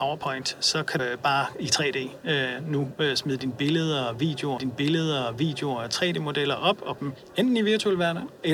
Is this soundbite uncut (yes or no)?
no